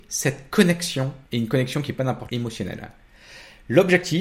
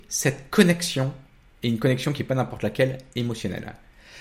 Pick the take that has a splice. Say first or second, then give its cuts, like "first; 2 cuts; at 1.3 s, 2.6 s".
first; 2 cuts; at 1.3 s, 2.3 s